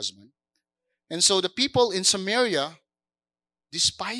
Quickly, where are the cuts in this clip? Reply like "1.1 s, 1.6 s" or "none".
none